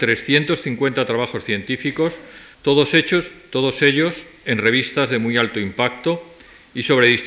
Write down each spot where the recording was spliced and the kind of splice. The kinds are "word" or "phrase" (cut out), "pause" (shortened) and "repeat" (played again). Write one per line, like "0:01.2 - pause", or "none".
0:02.5 - pause